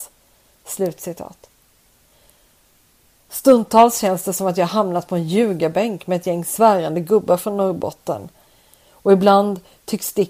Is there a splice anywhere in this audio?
no; 0 cuts

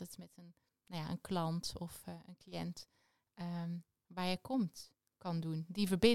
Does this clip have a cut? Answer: no; 0 cuts

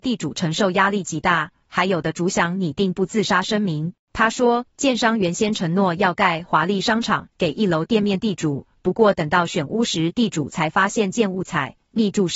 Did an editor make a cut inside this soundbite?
yes; 1 cut; at 4.0 s

